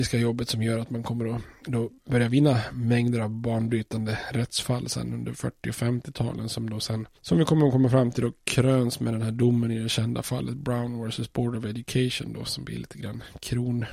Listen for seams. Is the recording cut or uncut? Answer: cut